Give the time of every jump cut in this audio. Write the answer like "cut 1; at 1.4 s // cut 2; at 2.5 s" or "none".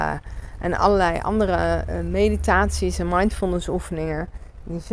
none